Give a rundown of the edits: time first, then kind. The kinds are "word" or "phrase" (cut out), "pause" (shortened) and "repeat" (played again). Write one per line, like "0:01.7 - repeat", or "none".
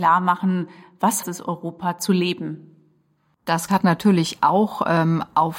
0:01.2 - word
0:03.7 - word